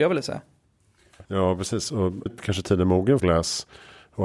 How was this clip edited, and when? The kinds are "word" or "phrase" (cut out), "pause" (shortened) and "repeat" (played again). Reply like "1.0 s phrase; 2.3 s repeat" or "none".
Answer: 1.2 s pause; 2.3 s word; 3.2 s phrase